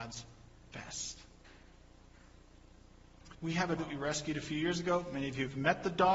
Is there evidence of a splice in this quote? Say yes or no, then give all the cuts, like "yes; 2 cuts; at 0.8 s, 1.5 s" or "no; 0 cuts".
yes; 2 cuts; at 3.3 s, 3.8 s